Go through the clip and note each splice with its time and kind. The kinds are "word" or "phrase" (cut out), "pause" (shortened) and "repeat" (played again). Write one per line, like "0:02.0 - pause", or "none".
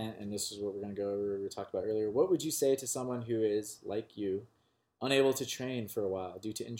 none